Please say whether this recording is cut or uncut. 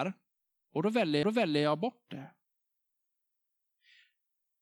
cut